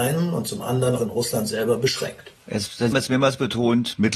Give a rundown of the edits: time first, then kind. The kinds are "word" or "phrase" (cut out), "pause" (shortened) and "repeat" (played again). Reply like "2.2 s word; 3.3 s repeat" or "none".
1.0 s word; 2.4 s pause; 2.9 s word